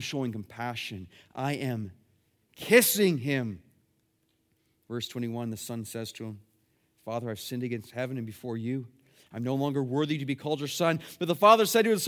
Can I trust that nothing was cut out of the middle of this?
yes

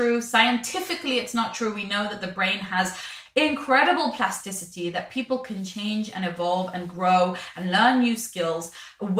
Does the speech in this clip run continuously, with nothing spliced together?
yes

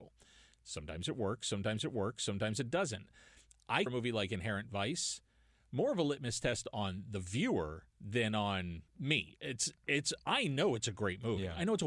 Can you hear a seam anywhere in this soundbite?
yes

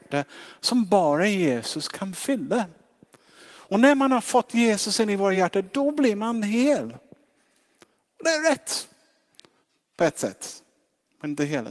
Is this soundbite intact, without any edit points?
yes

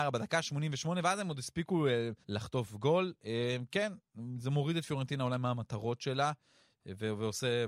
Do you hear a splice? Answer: yes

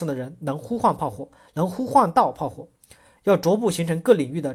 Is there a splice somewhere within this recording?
no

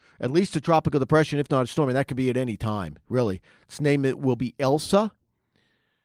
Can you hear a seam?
no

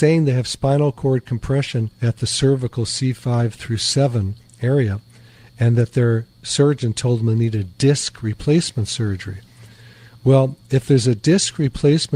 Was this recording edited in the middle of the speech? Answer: yes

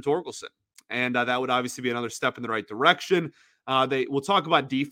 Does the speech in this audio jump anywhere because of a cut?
no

